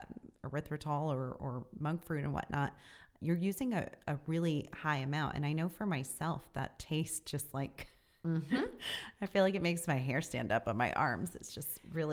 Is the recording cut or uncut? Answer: uncut